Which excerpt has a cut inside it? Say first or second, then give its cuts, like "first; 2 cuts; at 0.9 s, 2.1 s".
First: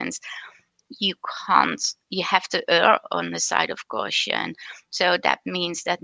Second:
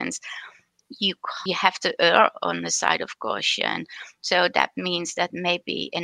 second; 1 cut; at 1.5 s